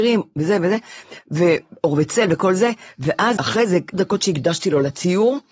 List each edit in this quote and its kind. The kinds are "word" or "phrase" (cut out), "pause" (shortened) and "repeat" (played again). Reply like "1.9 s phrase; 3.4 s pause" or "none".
3.4 s word; 3.9 s word